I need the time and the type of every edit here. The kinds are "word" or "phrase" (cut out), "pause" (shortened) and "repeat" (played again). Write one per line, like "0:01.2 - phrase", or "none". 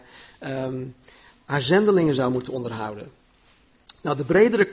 none